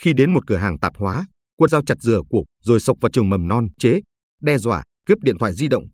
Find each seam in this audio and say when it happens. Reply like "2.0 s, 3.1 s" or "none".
1.7 s, 2.5 s, 3.8 s, 4.9 s